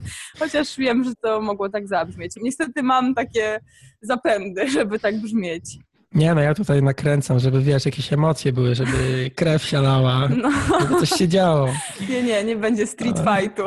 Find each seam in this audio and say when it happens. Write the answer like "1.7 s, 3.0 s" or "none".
none